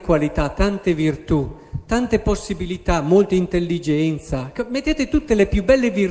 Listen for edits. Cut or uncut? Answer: uncut